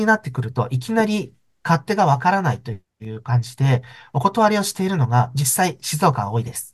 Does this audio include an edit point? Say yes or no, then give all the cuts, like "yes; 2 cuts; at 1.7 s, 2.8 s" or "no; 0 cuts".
no; 0 cuts